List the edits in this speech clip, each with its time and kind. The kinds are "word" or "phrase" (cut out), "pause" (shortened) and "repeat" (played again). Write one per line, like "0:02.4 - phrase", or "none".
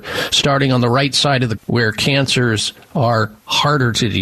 0:01.6 - word

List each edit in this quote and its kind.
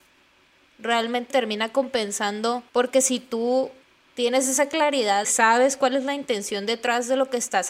0:01.3 - word
0:02.7 - pause
0:03.8 - pause
0:05.2 - phrase

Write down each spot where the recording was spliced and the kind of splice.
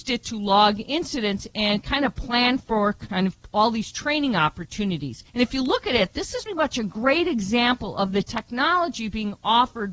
0:05.3 - pause
0:06.5 - word

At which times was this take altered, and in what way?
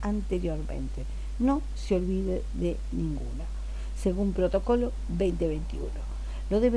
none

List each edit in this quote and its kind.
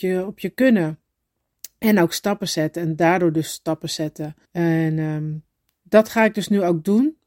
0:04.4 - pause

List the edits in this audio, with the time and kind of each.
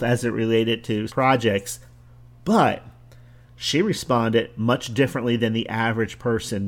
0:01.1 - word
0:03.5 - phrase

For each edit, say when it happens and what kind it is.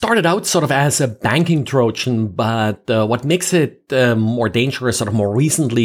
none

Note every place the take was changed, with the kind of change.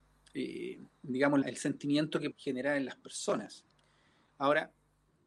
0:01.4 - word
0:02.3 - word

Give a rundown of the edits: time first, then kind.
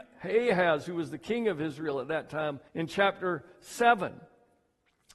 0:02.7 - pause

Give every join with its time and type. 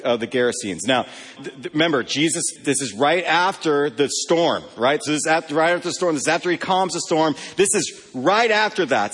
0:01.4 - word
0:02.6 - word

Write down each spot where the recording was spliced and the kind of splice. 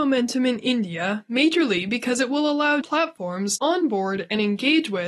0:02.8 - word
0:03.6 - word

